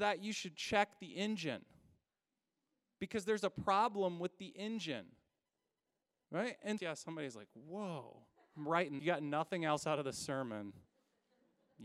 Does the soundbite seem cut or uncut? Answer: cut